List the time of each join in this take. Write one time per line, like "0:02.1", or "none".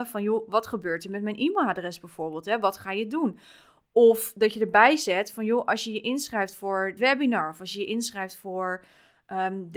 0:07.0